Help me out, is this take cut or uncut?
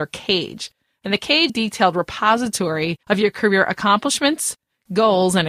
cut